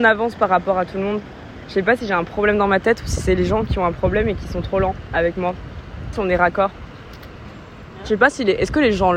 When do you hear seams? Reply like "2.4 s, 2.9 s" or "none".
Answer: 6.1 s